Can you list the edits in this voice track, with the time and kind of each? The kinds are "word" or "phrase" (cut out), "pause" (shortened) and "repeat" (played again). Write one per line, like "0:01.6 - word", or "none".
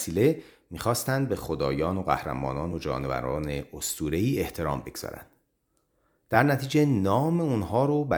none